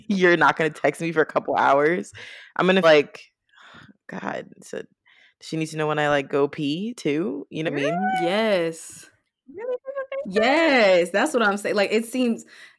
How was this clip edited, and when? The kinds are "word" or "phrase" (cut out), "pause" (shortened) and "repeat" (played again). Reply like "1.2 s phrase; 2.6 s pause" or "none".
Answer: 2.8 s word; 7.7 s word